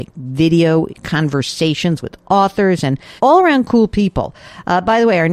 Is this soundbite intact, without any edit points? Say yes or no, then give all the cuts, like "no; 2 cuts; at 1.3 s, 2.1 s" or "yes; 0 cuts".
no; 1 cut; at 3.2 s